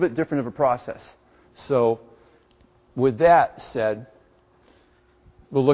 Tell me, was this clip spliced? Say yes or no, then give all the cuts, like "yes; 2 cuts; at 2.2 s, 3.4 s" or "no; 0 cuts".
no; 0 cuts